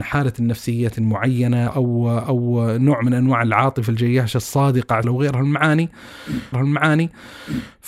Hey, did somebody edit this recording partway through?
yes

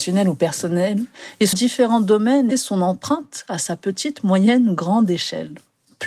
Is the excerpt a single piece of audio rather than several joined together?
no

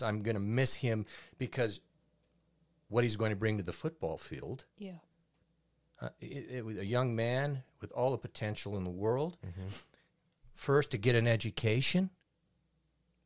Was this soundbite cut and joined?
no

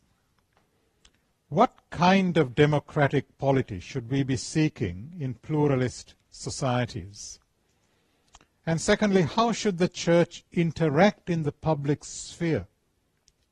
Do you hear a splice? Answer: no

